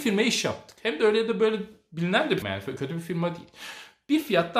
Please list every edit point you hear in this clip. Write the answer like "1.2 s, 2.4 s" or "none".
2.4 s